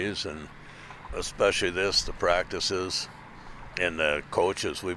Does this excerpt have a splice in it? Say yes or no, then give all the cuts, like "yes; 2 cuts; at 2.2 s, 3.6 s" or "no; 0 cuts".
yes; 2 cuts; at 1.1 s, 3.7 s